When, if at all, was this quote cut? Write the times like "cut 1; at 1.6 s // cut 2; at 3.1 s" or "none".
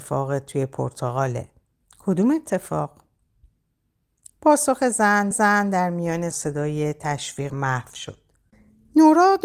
cut 1; at 1.8 s // cut 2; at 5.3 s // cut 3; at 6.3 s // cut 4; at 7.5 s